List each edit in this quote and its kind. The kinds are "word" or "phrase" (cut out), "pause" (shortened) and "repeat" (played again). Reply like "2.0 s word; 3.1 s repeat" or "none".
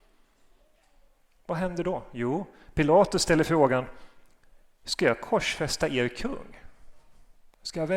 none